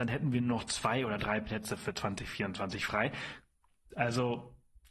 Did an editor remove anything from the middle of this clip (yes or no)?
no